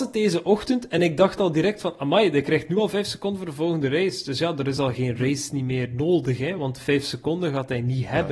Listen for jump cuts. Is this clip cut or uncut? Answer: uncut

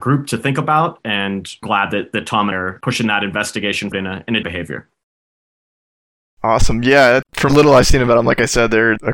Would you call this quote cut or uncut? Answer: cut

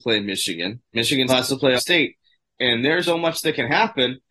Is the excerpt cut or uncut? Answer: cut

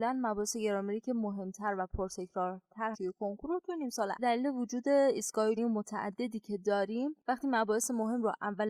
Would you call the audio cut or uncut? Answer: cut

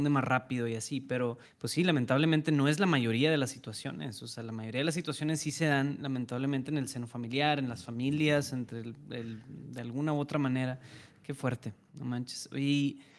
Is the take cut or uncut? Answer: cut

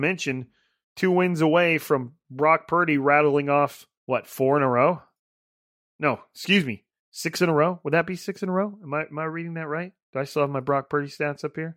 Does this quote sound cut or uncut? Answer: cut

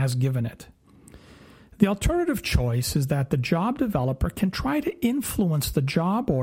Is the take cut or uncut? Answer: uncut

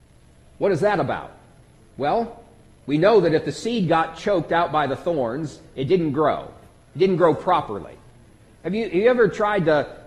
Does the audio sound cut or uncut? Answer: uncut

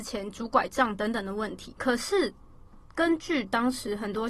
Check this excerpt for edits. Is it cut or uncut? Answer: cut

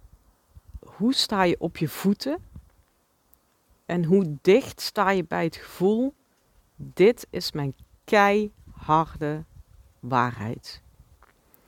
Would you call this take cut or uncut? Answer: uncut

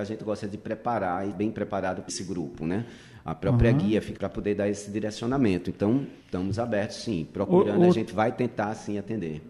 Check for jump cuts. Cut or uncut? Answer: cut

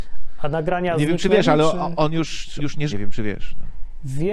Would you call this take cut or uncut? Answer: cut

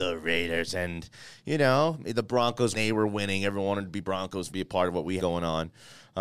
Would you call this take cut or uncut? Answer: cut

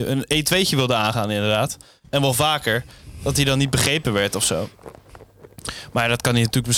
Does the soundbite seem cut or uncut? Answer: uncut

